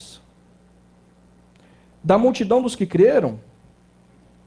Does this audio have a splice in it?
no; 0 cuts

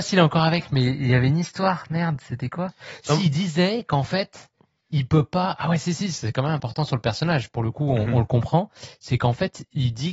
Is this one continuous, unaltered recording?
yes; 0 cuts

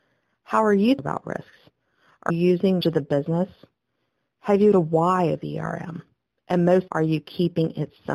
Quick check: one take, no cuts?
no; 5 cuts; at 1.0 s, 2.3 s, 2.8 s, 4.7 s, 6.9 s

